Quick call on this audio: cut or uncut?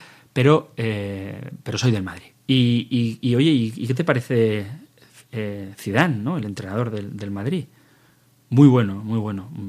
uncut